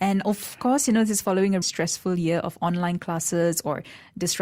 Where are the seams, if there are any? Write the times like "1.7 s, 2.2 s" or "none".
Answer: 1.6 s